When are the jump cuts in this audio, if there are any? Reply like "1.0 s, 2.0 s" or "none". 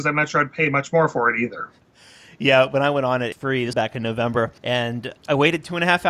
3.3 s, 3.7 s, 4.6 s